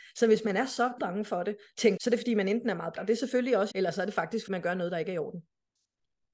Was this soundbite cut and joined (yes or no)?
yes